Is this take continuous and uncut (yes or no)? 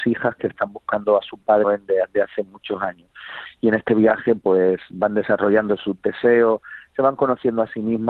no